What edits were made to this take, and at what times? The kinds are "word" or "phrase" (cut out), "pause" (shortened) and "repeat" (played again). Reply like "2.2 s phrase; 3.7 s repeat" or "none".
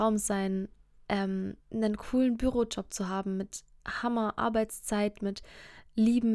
1.6 s pause